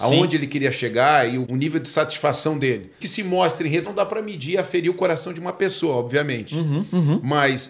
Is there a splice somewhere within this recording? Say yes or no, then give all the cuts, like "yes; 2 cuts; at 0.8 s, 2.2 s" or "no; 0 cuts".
yes; 3 cuts; at 1.4 s, 3.0 s, 3.8 s